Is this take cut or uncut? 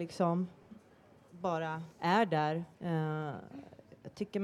cut